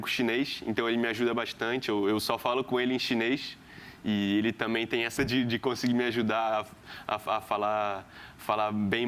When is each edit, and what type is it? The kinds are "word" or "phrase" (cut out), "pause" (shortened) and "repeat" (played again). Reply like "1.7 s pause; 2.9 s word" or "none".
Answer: 5.2 s word